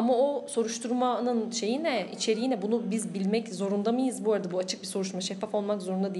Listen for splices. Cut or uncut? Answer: uncut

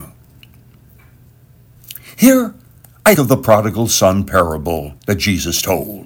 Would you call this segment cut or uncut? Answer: cut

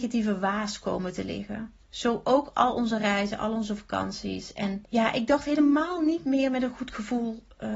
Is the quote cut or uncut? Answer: cut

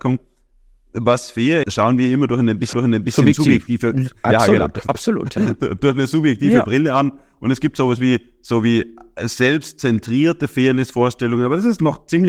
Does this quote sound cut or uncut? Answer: cut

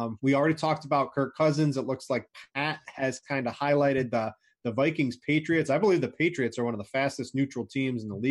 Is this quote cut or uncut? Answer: uncut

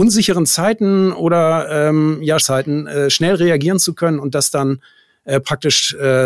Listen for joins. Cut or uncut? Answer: cut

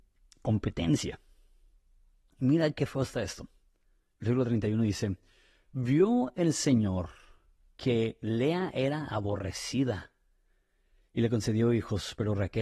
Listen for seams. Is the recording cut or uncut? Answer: uncut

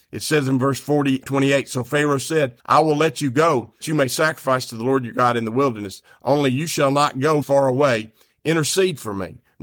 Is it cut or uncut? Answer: cut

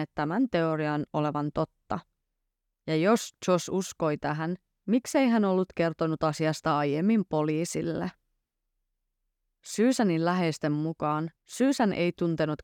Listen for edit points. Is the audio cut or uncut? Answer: cut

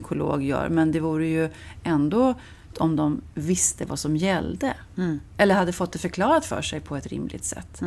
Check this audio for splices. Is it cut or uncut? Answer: cut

